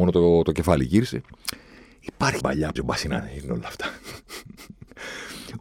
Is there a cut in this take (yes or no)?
yes